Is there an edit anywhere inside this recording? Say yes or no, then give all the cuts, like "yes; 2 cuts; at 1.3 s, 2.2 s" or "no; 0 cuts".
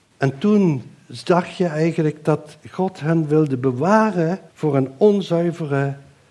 yes; 1 cut; at 4.5 s